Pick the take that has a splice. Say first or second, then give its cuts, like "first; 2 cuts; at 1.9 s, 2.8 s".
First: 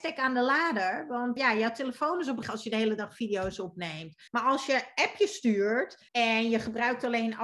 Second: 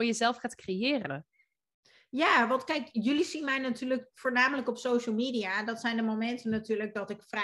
first; 4 cuts; at 1.4 s, 2.4 s, 4.3 s, 6.1 s